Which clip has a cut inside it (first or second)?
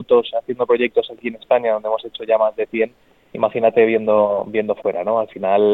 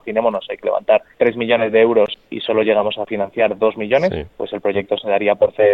second